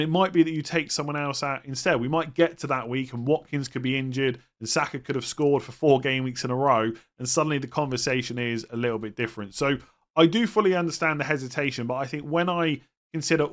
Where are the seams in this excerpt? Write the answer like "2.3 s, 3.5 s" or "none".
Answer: none